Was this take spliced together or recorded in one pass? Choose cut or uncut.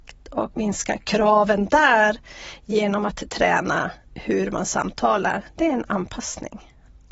uncut